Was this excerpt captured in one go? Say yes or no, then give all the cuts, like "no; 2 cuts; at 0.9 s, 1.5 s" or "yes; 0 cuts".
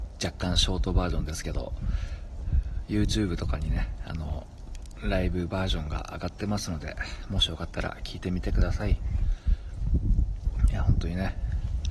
yes; 0 cuts